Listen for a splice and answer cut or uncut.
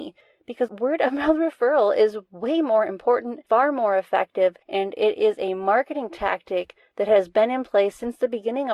cut